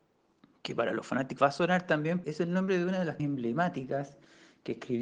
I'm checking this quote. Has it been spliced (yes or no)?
yes